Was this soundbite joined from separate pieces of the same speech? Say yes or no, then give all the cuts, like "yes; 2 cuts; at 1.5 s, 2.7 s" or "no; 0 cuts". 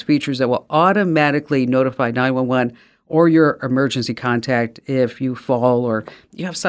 no; 0 cuts